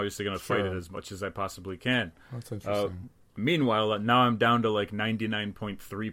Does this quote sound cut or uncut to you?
uncut